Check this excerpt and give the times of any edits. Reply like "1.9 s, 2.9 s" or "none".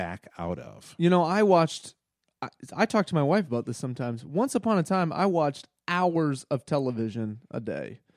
none

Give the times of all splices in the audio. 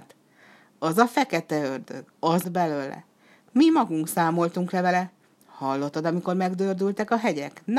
2.4 s, 5.2 s

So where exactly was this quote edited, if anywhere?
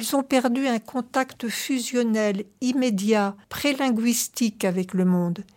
3.4 s

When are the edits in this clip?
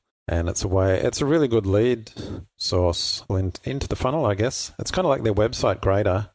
3.3 s

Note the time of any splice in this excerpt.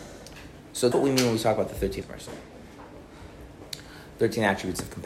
0.9 s, 2.0 s

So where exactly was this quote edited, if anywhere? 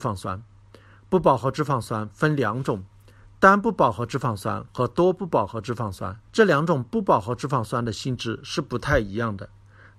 6.2 s

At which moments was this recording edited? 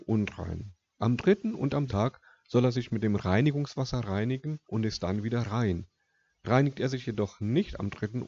1.9 s, 4.6 s

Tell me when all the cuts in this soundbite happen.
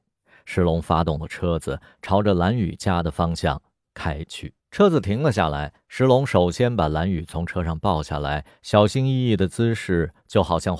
4.6 s

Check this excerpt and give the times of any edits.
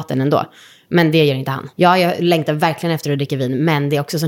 1.7 s

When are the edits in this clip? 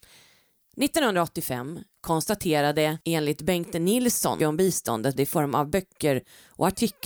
3.0 s, 4.4 s, 5.2 s

